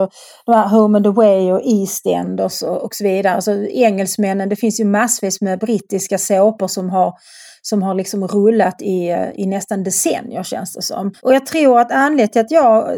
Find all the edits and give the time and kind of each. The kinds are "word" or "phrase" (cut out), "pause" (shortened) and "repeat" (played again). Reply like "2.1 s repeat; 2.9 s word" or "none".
11.2 s pause